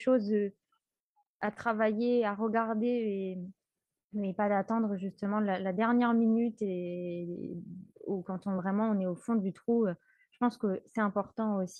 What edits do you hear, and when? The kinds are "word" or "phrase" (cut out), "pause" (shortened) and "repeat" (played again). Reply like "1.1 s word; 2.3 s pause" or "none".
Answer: none